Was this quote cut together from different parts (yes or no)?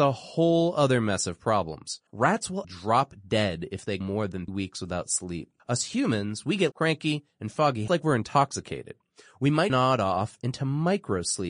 yes